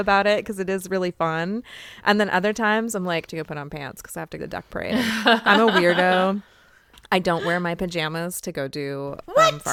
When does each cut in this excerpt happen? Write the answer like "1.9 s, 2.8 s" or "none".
3.3 s, 4.4 s